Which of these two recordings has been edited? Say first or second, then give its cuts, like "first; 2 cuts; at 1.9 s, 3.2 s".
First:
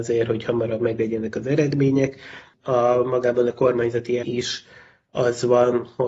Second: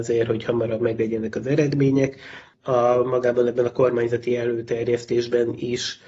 first; 2 cuts; at 3.5 s, 4.2 s